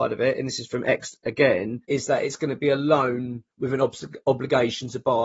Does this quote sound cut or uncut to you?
cut